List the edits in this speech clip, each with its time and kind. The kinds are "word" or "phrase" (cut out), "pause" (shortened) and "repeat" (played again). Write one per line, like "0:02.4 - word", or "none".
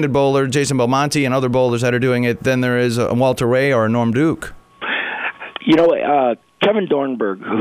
none

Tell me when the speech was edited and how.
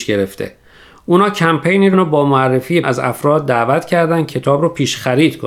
0:01.9 - word
0:02.8 - word
0:04.3 - word

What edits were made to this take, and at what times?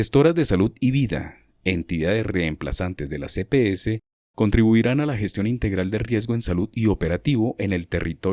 none

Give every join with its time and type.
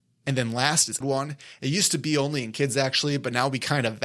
0:01.0 - phrase

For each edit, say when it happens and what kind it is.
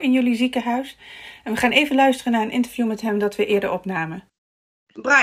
none

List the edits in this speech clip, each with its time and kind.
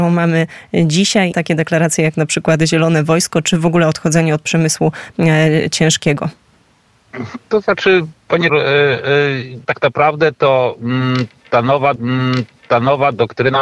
0:01.3 - phrase
0:08.5 - word
0:09.6 - pause
0:12.0 - repeat

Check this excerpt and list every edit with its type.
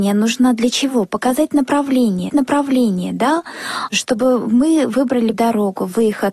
0:02.3 - repeat
0:05.3 - word

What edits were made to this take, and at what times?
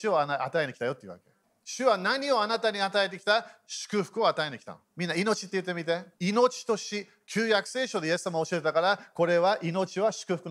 0:01.4 - pause
0:04.9 - pause
0:06.1 - pause

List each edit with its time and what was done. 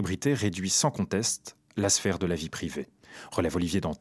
none

